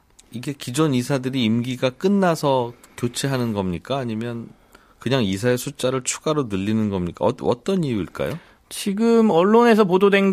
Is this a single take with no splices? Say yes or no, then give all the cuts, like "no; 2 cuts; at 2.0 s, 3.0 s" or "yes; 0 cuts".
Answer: yes; 0 cuts